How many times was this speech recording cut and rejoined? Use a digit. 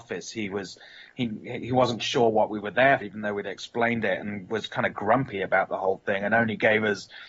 2